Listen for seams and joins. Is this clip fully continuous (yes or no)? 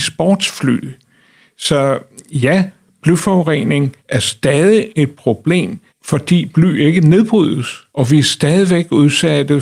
no